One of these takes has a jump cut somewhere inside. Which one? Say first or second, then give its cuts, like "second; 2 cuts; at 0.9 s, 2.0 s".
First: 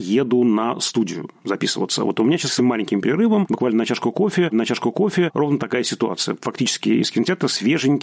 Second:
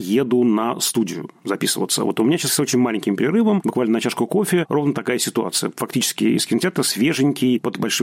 first; 2 cuts; at 2.6 s, 4.5 s